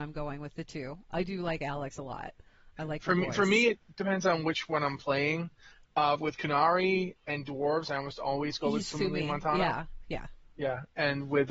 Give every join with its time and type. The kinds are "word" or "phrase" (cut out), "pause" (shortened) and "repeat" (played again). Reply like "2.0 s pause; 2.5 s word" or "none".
none